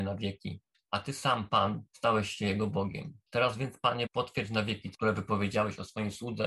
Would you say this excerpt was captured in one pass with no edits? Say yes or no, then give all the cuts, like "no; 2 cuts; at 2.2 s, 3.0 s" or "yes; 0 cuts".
no; 4 cuts; at 1.9 s, 3.3 s, 4.1 s, 4.9 s